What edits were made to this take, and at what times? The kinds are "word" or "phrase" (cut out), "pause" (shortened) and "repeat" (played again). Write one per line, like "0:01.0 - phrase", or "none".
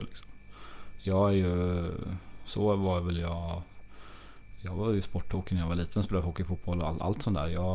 none

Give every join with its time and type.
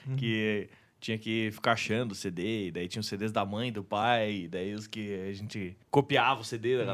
0:05.8 - pause

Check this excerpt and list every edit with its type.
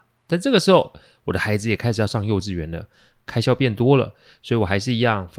none

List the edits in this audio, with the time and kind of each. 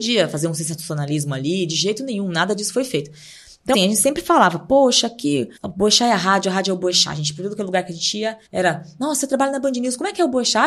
0:03.7 - word
0:05.6 - pause
0:08.5 - pause

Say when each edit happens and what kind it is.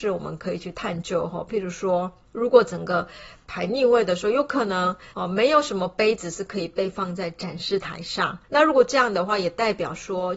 0:05.1 - pause
0:08.4 - pause

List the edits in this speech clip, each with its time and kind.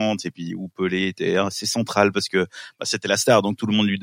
none

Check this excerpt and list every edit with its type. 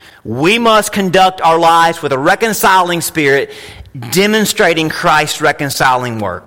none

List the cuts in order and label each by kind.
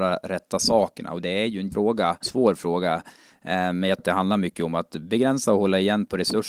0:01.7 - word
0:02.2 - word
0:04.0 - word

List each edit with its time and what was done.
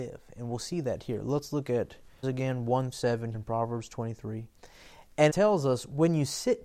0:02.2 - word
0:02.9 - word
0:03.3 - word
0:05.3 - word

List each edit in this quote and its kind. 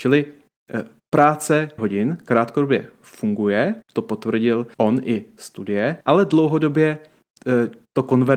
0:01.8 - word
0:03.8 - pause
0:04.7 - pause
0:06.0 - pause

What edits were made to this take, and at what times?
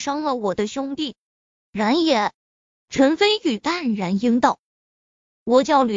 0:02.4 - pause
0:04.7 - pause

